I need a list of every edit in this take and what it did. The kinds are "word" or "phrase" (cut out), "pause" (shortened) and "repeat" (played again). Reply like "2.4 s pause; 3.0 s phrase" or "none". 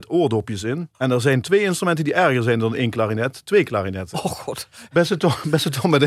0.9 s pause